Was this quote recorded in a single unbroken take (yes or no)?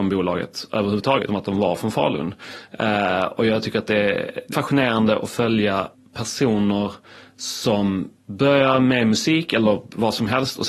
no